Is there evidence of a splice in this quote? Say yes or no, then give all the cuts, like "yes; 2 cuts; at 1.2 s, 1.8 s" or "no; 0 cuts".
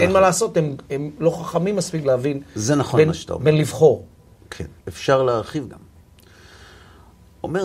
yes; 3 cuts; at 2.0 s, 4.8 s, 5.7 s